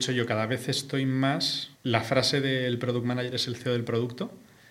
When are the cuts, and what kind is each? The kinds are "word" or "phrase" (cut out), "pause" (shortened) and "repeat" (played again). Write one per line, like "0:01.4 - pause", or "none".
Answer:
0:01.8 - pause